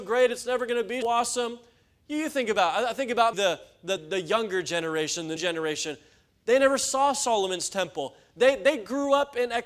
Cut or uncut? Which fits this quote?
cut